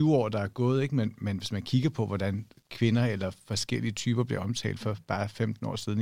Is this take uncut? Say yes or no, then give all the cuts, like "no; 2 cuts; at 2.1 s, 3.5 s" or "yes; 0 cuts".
yes; 0 cuts